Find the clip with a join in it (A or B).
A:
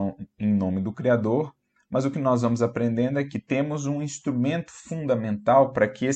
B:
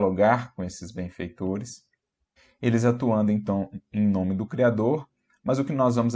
B